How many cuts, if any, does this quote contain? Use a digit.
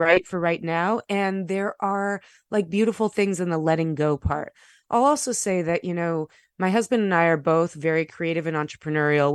0